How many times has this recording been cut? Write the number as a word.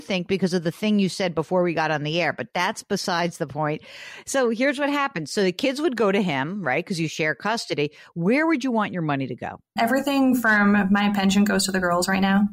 one